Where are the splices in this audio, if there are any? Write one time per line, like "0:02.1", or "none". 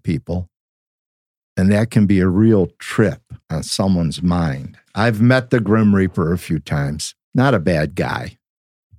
0:03.4
0:04.9